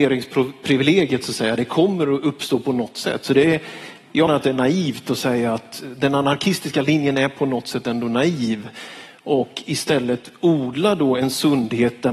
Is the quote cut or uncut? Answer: cut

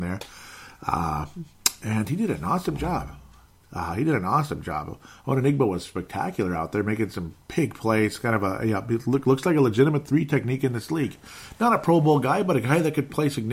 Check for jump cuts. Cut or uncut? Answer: uncut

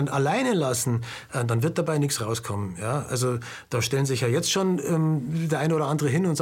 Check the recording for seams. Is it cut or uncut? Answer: uncut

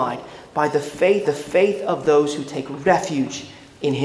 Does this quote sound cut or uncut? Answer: cut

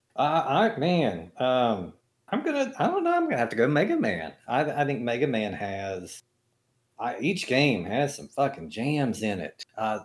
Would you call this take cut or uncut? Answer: uncut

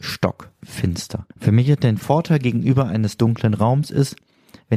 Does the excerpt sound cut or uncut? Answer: cut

